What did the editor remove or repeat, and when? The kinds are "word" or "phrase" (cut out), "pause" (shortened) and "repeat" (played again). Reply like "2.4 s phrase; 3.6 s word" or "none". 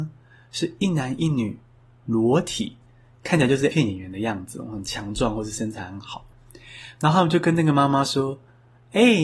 3.7 s word